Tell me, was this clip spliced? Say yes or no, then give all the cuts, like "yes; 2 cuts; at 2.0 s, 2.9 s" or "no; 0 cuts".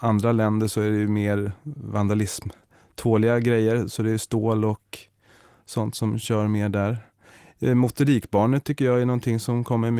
no; 0 cuts